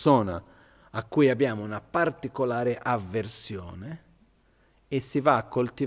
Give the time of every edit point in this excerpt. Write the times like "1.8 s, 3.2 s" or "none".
none